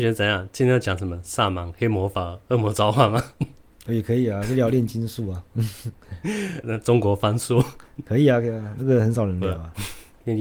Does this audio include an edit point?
yes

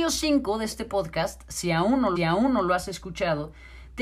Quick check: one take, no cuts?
no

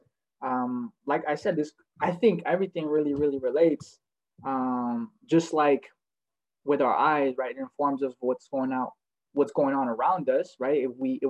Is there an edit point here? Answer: no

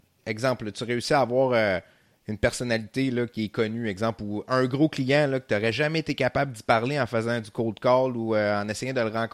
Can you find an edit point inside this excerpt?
no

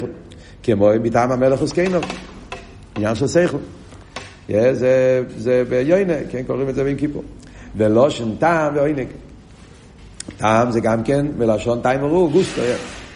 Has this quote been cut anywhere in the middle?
no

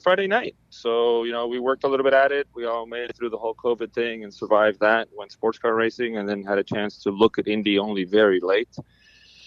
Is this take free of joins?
no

